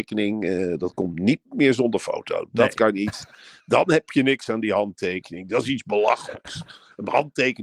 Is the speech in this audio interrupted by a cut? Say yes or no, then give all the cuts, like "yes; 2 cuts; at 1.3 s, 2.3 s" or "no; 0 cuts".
no; 0 cuts